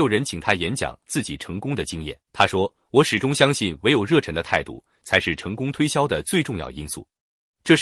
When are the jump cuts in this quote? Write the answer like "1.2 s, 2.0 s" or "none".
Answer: 2.2 s